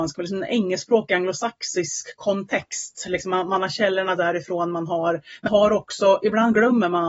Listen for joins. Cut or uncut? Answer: cut